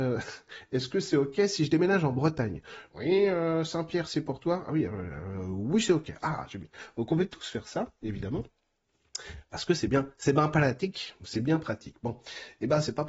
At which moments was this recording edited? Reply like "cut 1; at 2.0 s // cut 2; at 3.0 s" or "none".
none